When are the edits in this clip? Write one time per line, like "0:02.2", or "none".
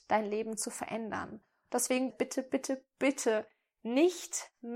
0:02.1

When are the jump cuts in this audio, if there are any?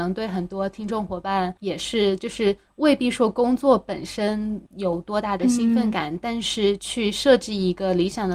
0:01.6
0:04.7

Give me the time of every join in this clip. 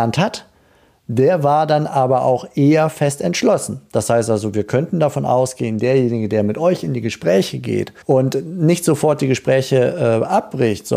0:08.0

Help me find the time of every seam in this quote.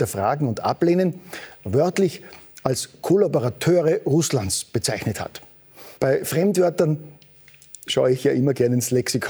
0:06.0

